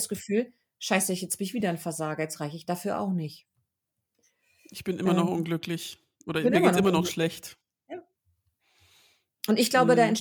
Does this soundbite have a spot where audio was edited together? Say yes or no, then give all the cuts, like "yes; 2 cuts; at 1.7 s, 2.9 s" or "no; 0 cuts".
no; 0 cuts